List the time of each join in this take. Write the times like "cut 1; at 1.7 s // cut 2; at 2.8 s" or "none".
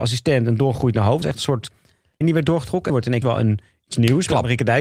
cut 1; at 1.2 s // cut 2; at 2.2 s // cut 3; at 2.9 s // cut 4; at 3.2 s